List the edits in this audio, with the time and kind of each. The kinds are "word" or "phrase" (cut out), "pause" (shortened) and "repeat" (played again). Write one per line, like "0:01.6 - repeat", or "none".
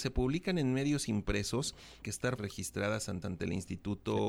0:02.0 - word
0:02.4 - word
0:03.2 - repeat

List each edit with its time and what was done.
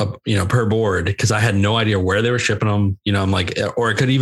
none

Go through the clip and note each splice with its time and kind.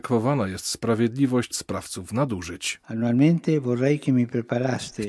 0:01.5 - word

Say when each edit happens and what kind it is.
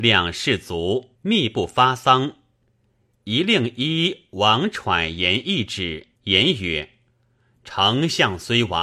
0:01.2 - pause
0:06.2 - pause

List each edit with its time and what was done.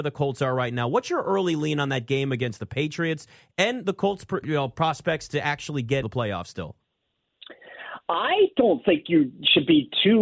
0:04.4 - word
0:06.0 - word

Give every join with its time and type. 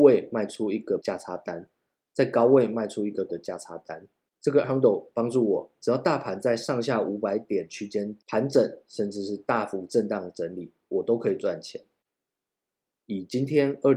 0:01.0 - word
0:03.3 - word
0:04.6 - word

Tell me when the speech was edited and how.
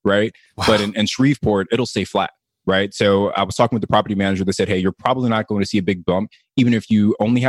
none

